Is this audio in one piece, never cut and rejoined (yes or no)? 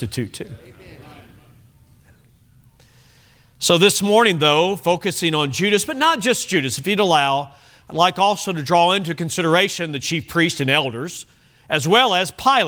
yes